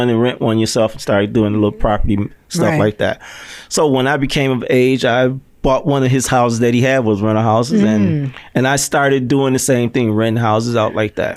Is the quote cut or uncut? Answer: uncut